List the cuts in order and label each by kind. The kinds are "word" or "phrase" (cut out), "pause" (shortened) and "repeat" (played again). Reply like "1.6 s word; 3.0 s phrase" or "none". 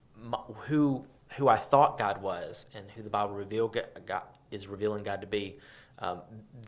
none